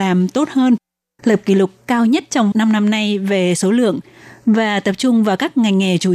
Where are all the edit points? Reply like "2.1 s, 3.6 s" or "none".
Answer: 2.5 s